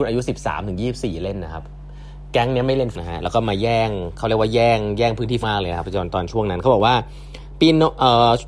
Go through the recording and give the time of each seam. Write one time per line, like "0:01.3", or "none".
0:02.9
0:05.4